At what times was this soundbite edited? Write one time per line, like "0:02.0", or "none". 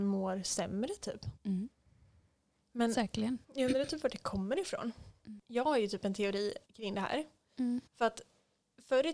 0:01.4
0:03.4
0:05.4
0:06.6
0:07.9